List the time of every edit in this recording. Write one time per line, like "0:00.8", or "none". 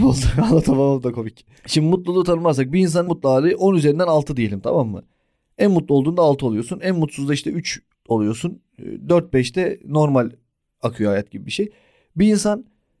0:03.1

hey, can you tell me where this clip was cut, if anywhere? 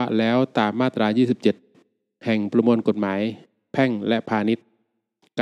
none

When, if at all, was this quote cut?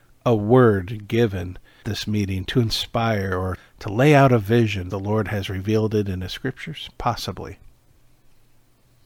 0:01.8
0:03.6
0:04.9

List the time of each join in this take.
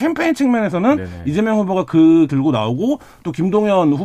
0:02.3

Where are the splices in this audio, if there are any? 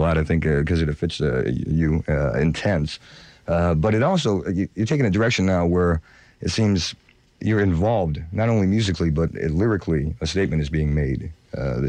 none

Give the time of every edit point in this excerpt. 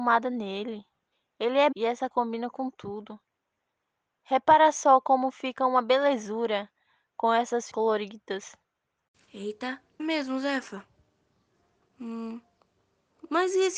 0:01.7
0:02.1
0:07.7
0:10.0

